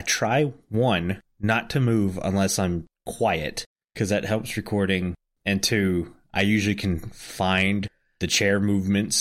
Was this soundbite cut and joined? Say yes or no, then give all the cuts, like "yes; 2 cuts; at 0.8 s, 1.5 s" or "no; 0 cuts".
no; 0 cuts